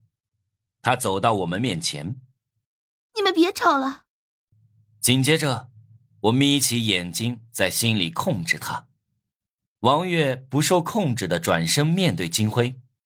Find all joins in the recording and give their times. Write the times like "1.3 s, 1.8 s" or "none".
none